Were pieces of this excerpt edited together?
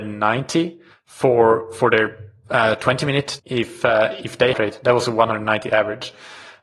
yes; 3 cuts; at 0.9 s, 3.4 s, 4.5 s

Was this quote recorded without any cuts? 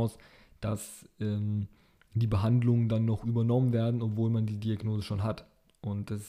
yes; 0 cuts

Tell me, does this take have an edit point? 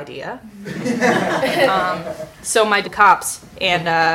yes; 1 cut; at 2.8 s

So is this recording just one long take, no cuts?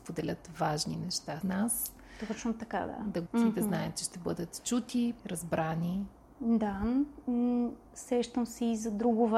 no; 4 cuts; at 1.4 s, 3.3 s, 5.2 s, 7.8 s

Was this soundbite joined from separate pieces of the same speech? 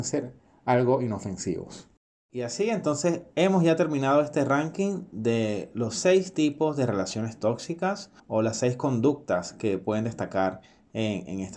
yes; 3 cuts; at 2.0 s, 3.3 s, 8.2 s

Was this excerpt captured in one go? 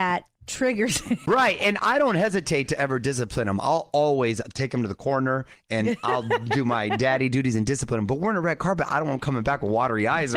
yes; 0 cuts

